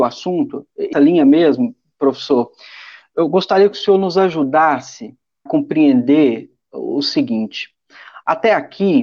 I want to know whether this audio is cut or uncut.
cut